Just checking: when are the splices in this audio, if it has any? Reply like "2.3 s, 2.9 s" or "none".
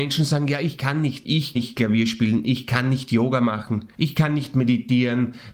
1.2 s, 1.6 s, 3.9 s